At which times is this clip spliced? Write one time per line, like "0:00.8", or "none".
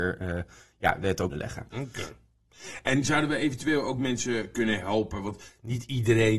0:01.3